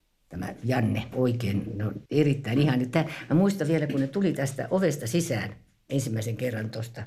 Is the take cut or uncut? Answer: cut